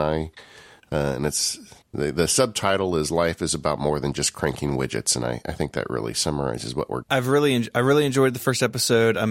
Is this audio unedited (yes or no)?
no